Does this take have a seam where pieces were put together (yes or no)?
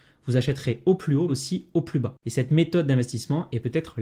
yes